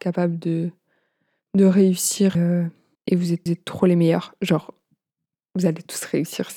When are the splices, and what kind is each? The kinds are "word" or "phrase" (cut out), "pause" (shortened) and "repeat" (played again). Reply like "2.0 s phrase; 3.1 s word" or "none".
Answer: 2.3 s phrase; 2.9 s pause; 3.5 s repeat